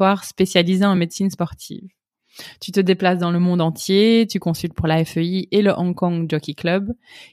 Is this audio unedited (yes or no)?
yes